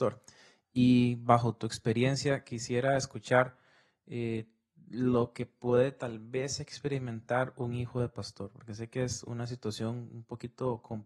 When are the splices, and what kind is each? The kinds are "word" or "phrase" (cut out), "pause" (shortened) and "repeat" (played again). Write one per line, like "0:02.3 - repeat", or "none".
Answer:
none